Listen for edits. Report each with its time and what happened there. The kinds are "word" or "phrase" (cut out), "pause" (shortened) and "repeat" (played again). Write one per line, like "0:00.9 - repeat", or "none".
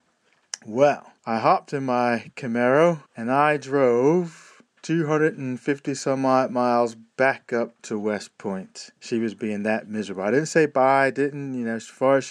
0:01.2 - pause
0:03.1 - pause
0:04.7 - pause
0:07.8 - pause
0:09.0 - pause

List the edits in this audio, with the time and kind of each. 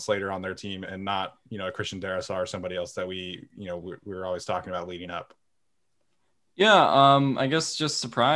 none

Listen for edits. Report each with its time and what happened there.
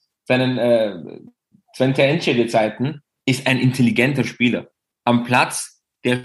none

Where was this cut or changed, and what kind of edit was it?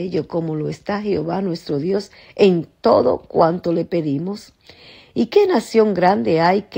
none

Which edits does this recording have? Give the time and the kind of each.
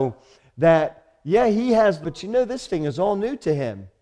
0:02.0 - word
0:02.7 - word

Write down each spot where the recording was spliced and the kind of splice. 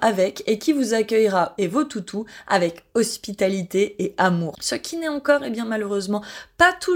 0:01.6 - word

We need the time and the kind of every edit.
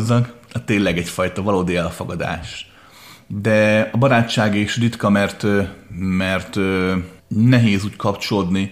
0:07.2 - pause

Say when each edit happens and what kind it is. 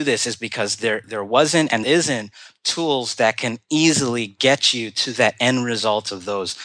0:01.0 - word
0:01.8 - word

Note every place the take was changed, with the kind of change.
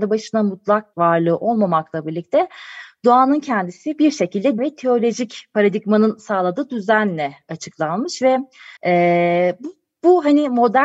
0:00.9 - word
0:04.6 - word
0:08.8 - pause

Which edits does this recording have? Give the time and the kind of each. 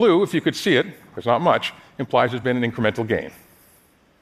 none

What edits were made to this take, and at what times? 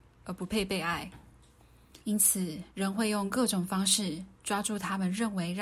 0:02.0 - pause
0:02.7 - pause

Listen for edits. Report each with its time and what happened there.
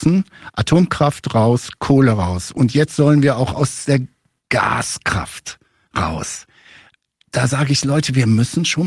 none

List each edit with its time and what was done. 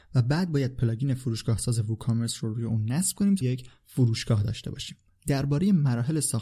0:03.4 - word

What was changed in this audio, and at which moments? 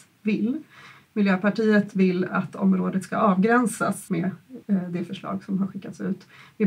0:04.1 - word
0:04.6 - pause

